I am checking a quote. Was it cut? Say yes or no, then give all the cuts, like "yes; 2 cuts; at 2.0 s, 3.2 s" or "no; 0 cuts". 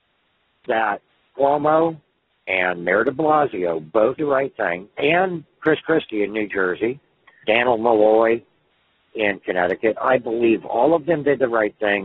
yes; 4 cuts; at 1.3 s, 4.2 s, 5.0 s, 7.4 s